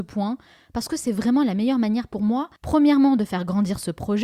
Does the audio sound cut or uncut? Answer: cut